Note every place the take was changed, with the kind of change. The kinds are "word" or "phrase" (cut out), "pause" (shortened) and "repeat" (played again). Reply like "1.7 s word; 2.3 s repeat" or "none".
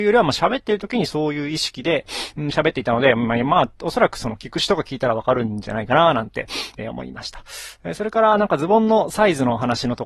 none